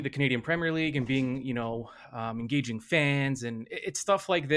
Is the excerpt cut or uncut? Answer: uncut